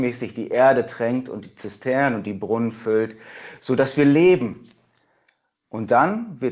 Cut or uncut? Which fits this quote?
uncut